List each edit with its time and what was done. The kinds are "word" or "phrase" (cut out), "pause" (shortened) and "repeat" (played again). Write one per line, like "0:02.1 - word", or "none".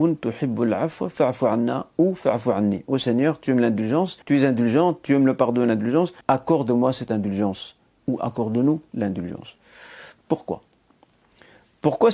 0:04.2 - pause
0:06.2 - pause